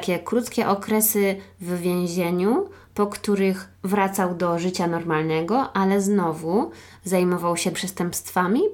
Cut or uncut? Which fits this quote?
cut